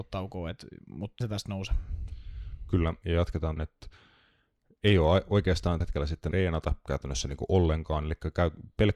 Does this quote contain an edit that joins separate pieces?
yes; 4 cuts; at 1.2 s, 3.6 s, 5.8 s, 6.3 s

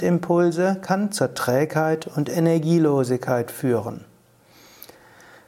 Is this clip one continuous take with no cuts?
yes; 0 cuts

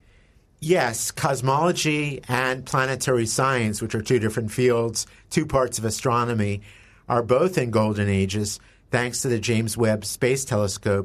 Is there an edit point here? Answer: no; 0 cuts

